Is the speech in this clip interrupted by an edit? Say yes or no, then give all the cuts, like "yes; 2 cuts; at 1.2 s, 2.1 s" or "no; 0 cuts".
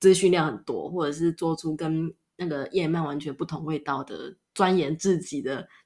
yes; 1 cut; at 4.5 s